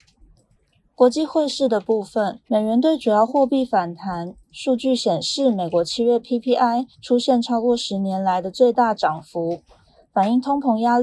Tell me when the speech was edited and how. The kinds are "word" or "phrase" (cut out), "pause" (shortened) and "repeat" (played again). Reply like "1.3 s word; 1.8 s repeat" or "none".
2.5 s pause; 6.9 s pause